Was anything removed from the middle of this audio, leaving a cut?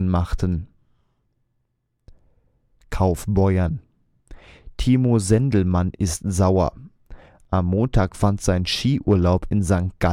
no; 0 cuts

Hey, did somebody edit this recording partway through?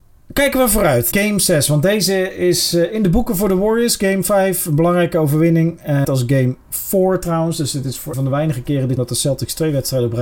yes; 5 cuts; at 1.1 s, 6.0 s, 6.6 s, 8.1 s, 9.0 s

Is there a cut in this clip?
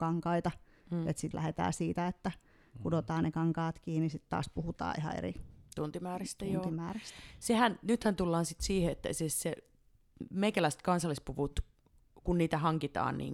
yes; 1 cut; at 1.3 s

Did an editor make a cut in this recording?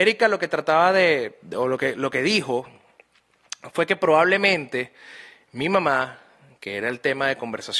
no; 0 cuts

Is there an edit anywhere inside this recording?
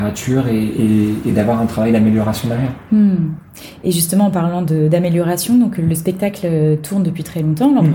no; 0 cuts

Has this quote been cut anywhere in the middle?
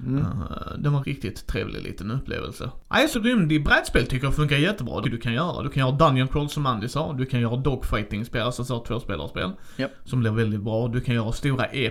yes; 3 cuts; at 1.0 s, 3.1 s, 5.0 s

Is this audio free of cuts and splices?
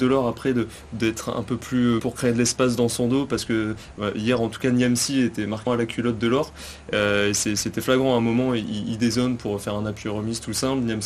no; 2 cuts; at 2.0 s, 5.7 s

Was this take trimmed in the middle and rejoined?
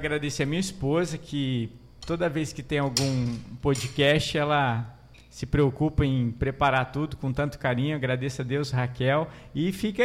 no; 0 cuts

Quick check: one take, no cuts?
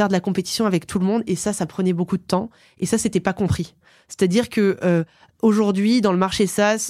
yes; 0 cuts

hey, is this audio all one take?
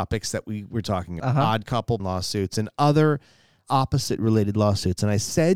no; 3 cuts; at 1.2 s, 2.0 s, 3.6 s

